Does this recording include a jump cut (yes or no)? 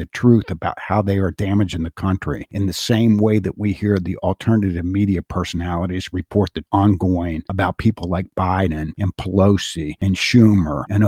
yes